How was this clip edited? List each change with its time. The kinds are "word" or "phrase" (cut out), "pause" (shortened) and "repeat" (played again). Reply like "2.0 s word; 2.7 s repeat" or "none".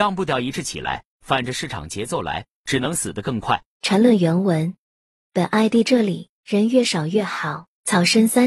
none